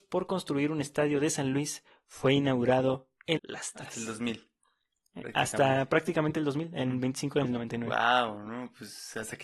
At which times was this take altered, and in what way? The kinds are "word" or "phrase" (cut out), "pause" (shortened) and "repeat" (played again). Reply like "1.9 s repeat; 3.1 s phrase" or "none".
3.4 s word; 7.4 s word

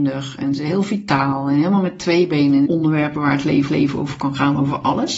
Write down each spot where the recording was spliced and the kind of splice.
2.7 s phrase; 3.7 s repeat

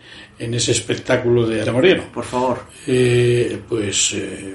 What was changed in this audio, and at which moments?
1.6 s word

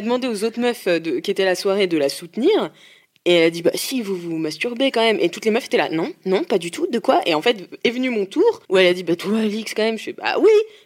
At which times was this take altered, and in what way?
8.6 s pause

